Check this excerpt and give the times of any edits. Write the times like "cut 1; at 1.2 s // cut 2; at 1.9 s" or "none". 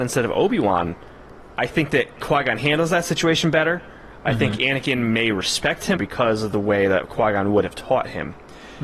cut 1; at 1.5 s // cut 2; at 6.0 s

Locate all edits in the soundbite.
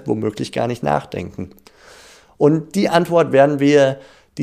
none

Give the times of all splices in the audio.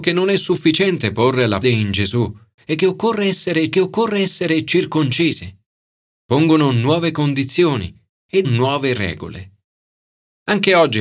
cut 1; at 1.6 s // cut 2; at 3.7 s // cut 3; at 8.4 s

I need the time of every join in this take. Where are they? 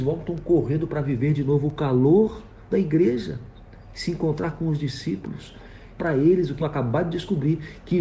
cut 1; at 2.7 s // cut 2; at 6.0 s // cut 3; at 6.6 s

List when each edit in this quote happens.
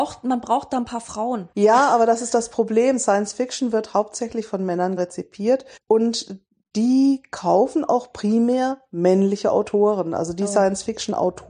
cut 1; at 1.5 s // cut 2; at 5.0 s // cut 3; at 5.8 s

